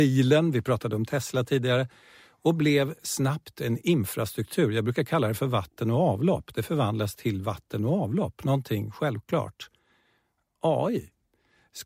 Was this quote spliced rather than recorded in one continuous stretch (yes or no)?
no